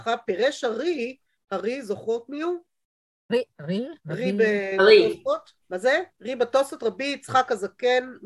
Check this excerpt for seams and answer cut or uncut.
cut